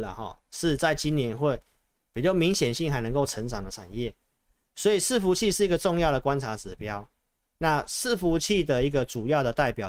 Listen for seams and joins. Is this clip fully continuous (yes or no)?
yes